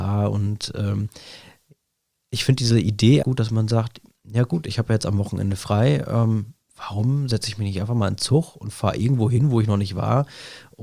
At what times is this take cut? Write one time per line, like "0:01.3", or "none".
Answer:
0:03.2